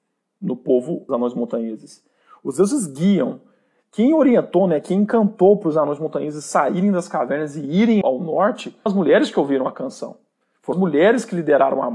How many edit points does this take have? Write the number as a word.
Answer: four